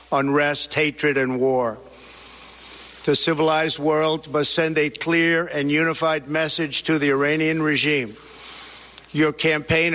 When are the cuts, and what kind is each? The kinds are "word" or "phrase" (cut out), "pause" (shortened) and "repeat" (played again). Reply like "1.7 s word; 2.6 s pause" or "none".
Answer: none